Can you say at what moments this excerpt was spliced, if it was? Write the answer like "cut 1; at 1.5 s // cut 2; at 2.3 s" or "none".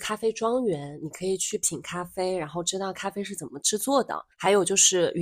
cut 1; at 4.3 s